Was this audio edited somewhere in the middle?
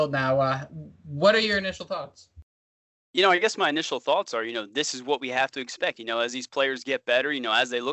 no; 0 cuts

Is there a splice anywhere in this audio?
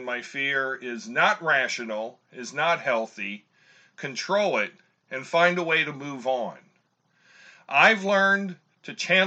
no; 0 cuts

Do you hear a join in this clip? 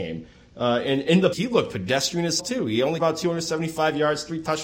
yes; 3 cuts; at 1.3 s, 2.4 s, 3.0 s

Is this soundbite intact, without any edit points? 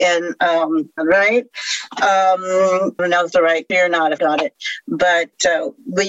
no; 5 cuts; at 1.0 s, 3.0 s, 3.3 s, 3.7 s, 4.2 s

